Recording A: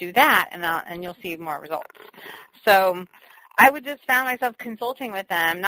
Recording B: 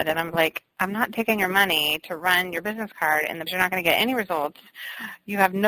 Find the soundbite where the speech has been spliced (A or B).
B